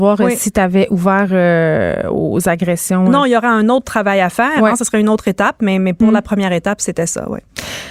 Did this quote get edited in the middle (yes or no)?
no